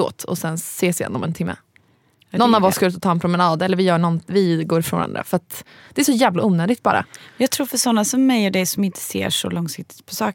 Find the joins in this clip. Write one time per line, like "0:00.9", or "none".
none

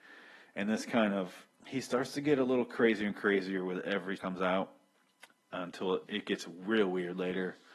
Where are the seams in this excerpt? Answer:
0:01.5
0:04.2
0:06.1

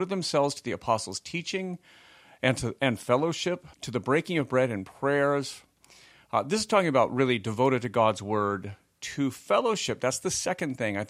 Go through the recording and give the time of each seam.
0:03.7

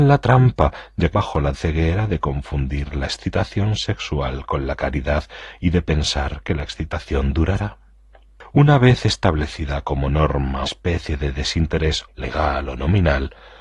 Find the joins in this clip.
0:01.1
0:01.5
0:10.7
0:12.1

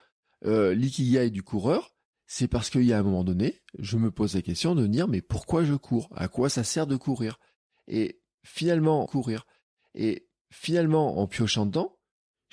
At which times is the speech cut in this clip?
0:09.1

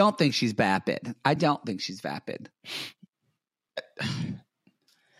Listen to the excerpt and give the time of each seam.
none

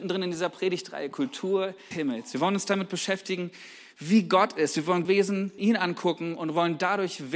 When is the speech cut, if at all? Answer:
0:01.9
0:05.0
0:05.6

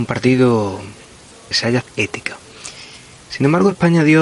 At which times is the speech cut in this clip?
0:01.5
0:01.8

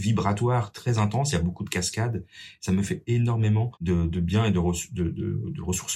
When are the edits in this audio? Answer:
0:03.8

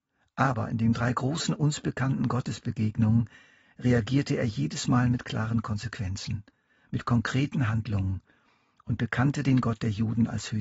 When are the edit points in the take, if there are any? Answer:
none

